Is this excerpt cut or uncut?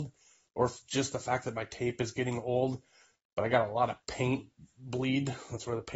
uncut